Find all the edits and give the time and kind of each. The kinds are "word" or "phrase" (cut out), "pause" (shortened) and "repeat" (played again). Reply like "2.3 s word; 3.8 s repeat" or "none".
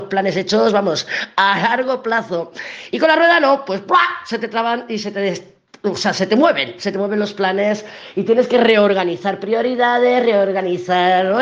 none